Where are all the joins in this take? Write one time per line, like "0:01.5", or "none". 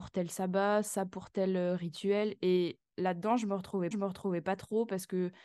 0:03.9